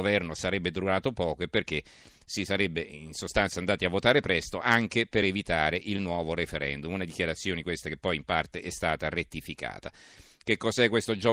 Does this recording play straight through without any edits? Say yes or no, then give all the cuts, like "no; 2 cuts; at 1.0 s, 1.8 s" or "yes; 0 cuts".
yes; 0 cuts